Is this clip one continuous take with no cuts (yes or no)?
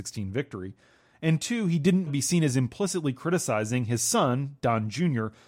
no